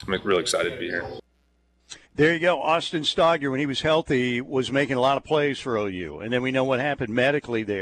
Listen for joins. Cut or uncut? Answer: cut